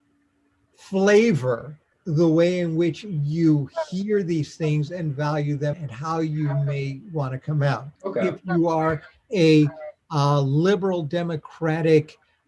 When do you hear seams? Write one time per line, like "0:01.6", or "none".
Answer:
0:05.7
0:08.0